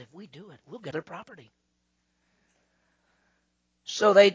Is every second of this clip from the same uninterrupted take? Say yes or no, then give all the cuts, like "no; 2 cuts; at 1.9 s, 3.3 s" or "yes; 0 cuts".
no; 1 cut; at 0.9 s